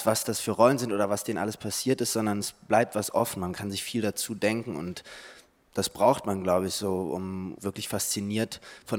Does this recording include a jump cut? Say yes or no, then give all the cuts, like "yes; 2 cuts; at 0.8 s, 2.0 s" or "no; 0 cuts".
yes; 1 cut; at 7.6 s